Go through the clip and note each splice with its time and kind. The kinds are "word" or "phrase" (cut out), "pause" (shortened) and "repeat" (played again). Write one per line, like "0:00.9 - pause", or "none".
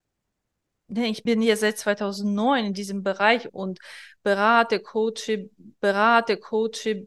0:01.3 - word
0:03.5 - word
0:05.8 - repeat